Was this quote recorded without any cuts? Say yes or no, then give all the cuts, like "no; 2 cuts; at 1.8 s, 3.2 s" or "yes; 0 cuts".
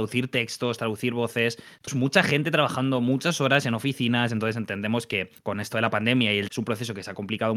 no; 3 cuts; at 1.9 s, 5.4 s, 6.5 s